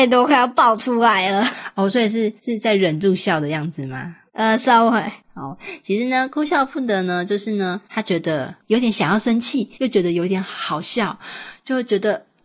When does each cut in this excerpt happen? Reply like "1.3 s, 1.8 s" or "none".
2.4 s, 4.3 s, 5.2 s, 7.8 s, 9.7 s